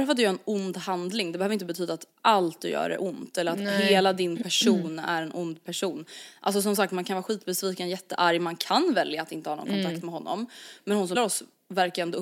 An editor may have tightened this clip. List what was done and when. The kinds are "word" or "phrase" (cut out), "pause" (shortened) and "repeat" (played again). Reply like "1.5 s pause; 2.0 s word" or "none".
11.2 s word